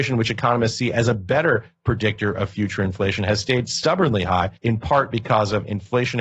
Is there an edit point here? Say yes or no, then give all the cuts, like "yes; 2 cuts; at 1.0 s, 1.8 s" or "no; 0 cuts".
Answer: yes; 1 cut; at 4.6 s